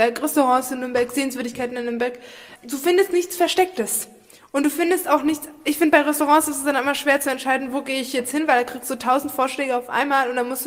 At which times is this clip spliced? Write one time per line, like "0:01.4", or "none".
0:02.6